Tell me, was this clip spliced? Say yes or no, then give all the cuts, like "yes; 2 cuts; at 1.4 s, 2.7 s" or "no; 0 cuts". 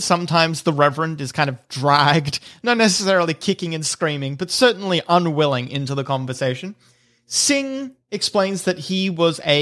no; 0 cuts